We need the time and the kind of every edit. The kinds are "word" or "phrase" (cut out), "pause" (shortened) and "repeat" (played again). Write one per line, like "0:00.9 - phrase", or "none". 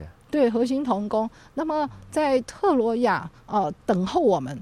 none